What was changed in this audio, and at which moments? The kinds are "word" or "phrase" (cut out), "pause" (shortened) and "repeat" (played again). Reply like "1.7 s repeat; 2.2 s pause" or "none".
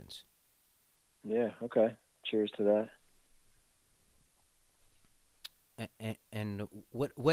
none